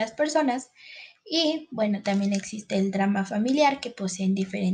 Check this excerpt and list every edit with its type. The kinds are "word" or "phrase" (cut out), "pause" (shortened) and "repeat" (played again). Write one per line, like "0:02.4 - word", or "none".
none